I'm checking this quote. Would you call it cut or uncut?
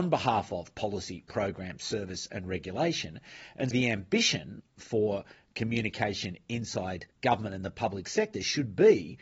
cut